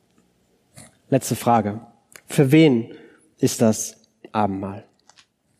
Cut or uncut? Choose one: uncut